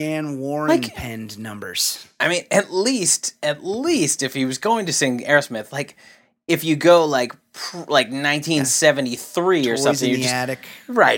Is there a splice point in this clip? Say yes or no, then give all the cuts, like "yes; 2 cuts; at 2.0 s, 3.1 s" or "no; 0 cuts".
no; 0 cuts